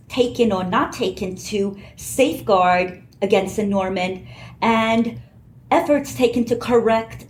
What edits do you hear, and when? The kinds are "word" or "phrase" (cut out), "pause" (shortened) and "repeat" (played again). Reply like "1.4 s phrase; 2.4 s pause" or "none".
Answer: none